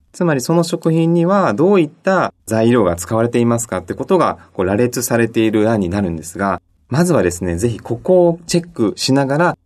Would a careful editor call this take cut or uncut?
cut